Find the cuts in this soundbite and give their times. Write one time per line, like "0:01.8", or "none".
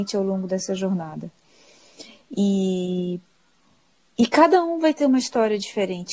none